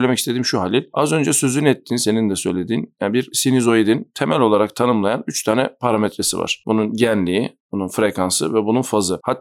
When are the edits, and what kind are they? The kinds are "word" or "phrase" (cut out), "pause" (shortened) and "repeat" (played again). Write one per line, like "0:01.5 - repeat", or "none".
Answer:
none